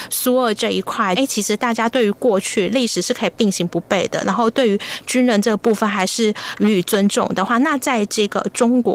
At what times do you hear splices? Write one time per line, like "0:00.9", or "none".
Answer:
0:01.2